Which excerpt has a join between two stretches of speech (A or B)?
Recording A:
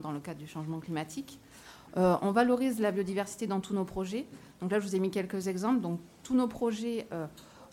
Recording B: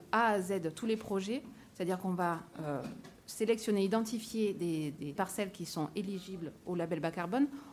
B